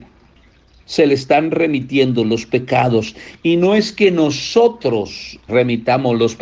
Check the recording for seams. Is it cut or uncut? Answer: cut